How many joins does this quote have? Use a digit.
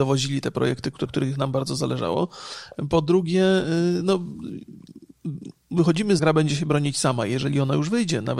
2